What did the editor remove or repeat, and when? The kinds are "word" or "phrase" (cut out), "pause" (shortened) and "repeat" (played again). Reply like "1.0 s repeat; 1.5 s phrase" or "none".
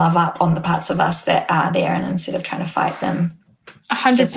none